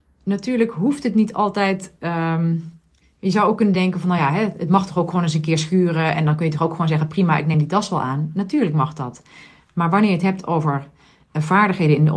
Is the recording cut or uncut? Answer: uncut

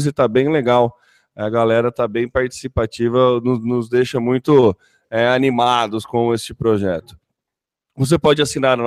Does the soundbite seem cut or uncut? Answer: uncut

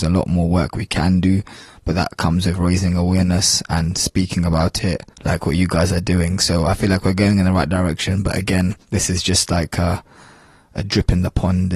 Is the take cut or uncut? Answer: cut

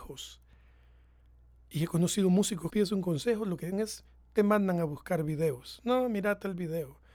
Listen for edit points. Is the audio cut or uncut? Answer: cut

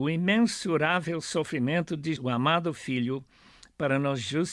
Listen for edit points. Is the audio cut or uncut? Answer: cut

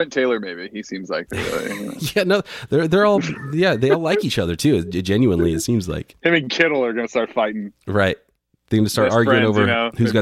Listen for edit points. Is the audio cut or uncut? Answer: uncut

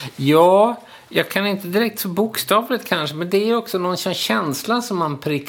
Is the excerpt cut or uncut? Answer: uncut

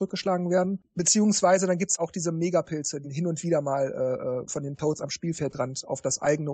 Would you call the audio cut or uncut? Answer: cut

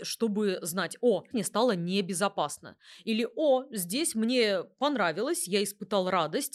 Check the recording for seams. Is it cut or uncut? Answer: cut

